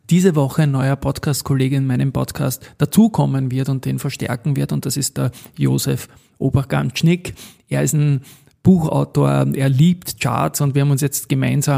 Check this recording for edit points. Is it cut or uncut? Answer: uncut